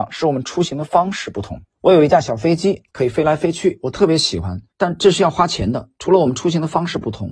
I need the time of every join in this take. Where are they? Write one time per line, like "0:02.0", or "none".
0:01.7
0:02.9
0:04.7